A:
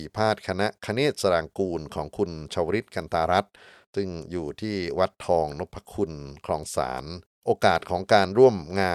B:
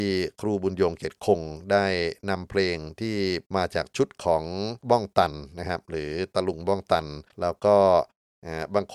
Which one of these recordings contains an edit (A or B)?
B